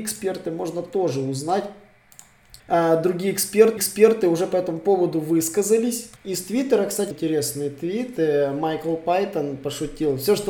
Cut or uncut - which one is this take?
cut